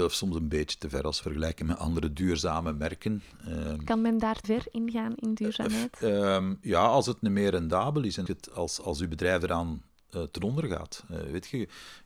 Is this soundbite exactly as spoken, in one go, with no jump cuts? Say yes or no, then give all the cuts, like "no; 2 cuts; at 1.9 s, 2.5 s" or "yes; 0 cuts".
no; 3 cuts; at 1.2 s, 4.4 s, 8.3 s